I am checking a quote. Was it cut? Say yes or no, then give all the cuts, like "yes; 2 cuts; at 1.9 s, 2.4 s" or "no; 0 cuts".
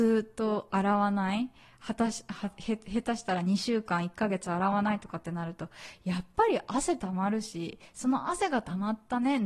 no; 0 cuts